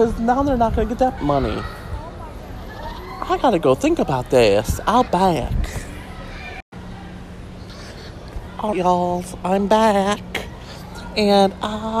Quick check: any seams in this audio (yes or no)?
yes